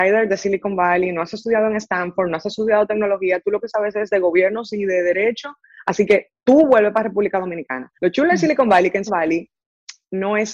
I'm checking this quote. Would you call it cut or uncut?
cut